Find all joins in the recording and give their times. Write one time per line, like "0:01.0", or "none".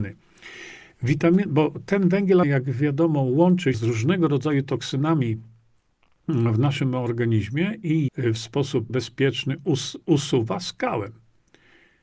0:02.4
0:03.7
0:08.1
0:08.9